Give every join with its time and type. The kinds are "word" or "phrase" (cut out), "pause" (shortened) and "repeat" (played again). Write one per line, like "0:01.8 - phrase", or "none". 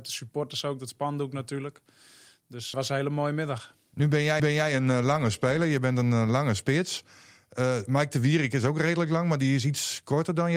0:02.7 - word
0:04.4 - repeat